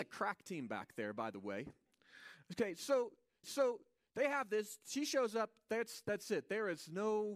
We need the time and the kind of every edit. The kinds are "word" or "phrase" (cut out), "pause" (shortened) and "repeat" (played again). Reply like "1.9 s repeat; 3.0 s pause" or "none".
3.4 s repeat